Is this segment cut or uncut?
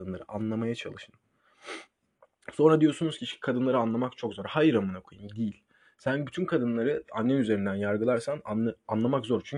uncut